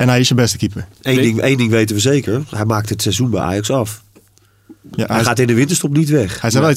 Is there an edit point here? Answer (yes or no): no